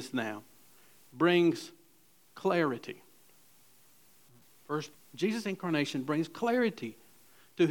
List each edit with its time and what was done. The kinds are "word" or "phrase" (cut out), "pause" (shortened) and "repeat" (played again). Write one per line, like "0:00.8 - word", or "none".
0:04.9 - word